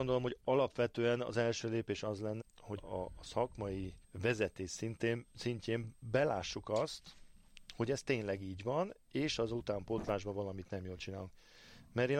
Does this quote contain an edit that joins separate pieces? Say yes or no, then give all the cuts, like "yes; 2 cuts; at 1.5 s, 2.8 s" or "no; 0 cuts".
yes; 3 cuts; at 2.4 s, 2.8 s, 4.0 s